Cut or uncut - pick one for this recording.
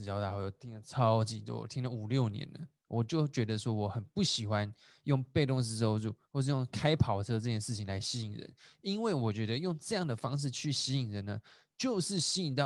uncut